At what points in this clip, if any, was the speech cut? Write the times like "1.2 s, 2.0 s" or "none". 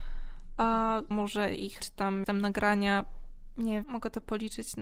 1.1 s, 1.8 s, 2.2 s, 3.8 s